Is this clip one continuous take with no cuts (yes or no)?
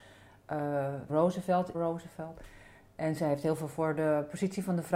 no